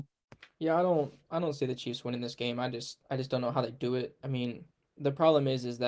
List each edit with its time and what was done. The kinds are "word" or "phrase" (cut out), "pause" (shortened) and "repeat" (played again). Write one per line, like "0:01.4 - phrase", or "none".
none